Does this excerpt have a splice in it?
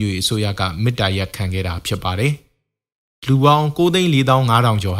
no; 0 cuts

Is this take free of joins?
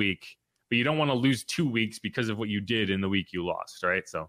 yes; 0 cuts

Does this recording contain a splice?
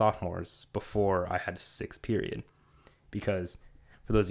no; 0 cuts

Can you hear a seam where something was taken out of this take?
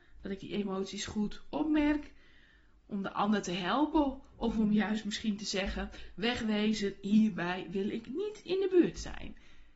no; 0 cuts

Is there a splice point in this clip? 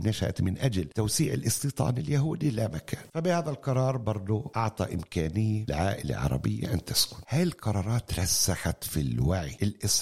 no; 0 cuts

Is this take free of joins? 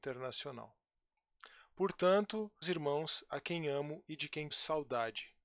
no; 2 cuts; at 2.6 s, 4.5 s

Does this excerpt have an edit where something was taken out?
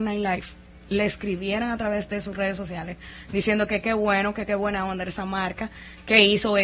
no; 0 cuts

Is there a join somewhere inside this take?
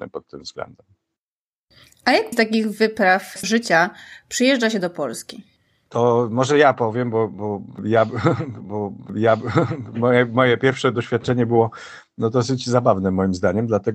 yes; 3 cuts; at 2.3 s, 3.4 s, 8.6 s

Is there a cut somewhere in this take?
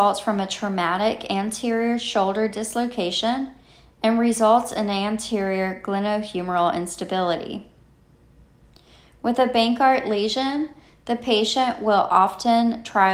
no; 0 cuts

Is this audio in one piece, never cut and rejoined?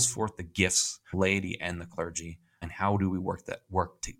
no; 2 cuts; at 1.1 s, 2.6 s

